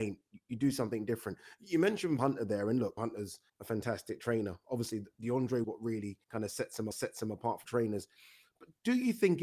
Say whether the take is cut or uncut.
cut